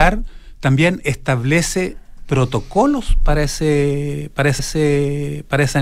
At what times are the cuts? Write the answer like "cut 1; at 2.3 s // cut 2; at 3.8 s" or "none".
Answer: cut 1; at 4.6 s